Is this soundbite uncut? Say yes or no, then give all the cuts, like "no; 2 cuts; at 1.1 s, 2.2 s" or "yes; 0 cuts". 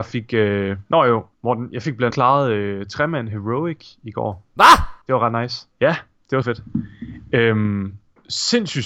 no; 5 cuts; at 1.3 s, 2.1 s, 5.0 s, 5.7 s, 6.4 s